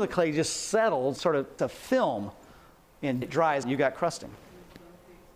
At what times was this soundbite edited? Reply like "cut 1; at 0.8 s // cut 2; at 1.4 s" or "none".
cut 1; at 1.2 s // cut 2; at 1.6 s // cut 3; at 3.2 s // cut 4; at 3.6 s